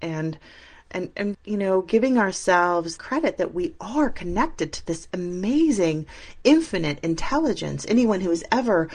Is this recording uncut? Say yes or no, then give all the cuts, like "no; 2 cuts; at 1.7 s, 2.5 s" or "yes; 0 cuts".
no; 2 cuts; at 1.3 s, 3.0 s